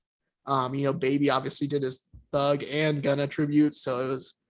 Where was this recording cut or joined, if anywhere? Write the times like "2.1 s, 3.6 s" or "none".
none